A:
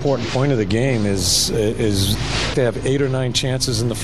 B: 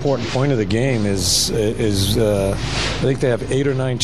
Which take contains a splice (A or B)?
A